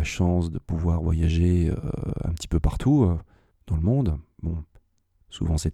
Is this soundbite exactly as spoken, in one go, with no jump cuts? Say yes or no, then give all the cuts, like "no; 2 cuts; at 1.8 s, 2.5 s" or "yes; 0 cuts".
no; 1 cut; at 3.5 s